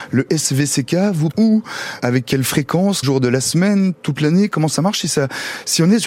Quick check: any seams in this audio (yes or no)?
yes